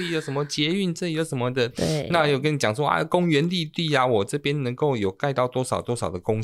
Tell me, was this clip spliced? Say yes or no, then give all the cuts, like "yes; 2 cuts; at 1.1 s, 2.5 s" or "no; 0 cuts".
yes; 1 cut; at 1.7 s